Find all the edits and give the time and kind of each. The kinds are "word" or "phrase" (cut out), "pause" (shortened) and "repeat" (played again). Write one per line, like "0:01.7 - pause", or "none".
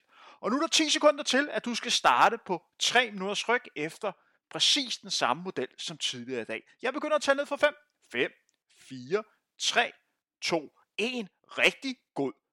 none